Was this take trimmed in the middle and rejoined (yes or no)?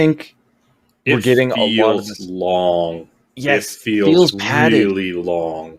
no